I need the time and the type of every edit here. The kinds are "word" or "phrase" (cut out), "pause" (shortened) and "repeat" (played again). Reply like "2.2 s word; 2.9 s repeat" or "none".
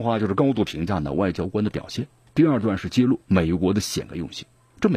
none